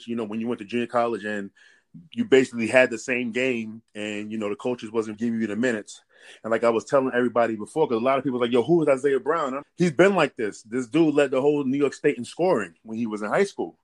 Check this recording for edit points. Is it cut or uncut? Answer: cut